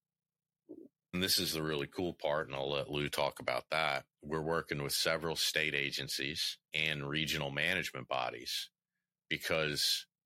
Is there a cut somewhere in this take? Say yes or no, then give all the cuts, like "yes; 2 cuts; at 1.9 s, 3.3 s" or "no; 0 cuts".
yes; 3 cuts; at 1.1 s, 4.1 s, 6.6 s